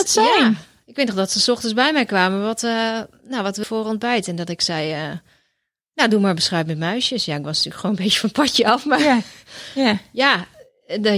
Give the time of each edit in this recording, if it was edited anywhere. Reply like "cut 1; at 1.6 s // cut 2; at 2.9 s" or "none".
cut 1; at 3.6 s